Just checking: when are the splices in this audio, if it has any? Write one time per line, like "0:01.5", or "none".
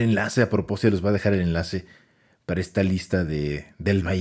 none